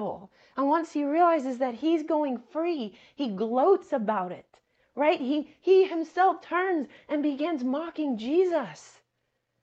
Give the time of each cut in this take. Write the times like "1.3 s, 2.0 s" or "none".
none